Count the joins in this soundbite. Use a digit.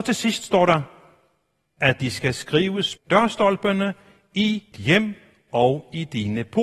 2